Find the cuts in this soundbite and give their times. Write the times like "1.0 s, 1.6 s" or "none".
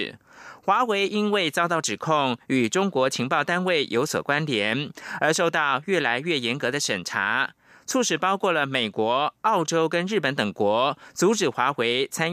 none